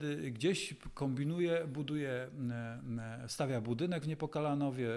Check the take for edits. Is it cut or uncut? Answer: uncut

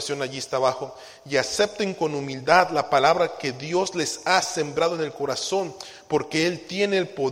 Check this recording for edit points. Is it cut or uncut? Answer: uncut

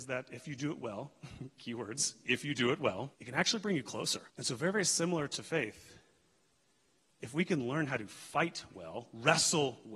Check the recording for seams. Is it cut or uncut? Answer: cut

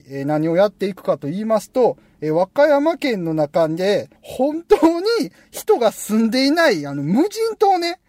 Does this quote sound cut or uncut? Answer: cut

